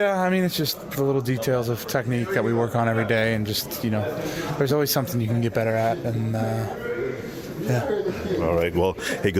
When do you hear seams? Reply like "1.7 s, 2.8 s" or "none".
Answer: none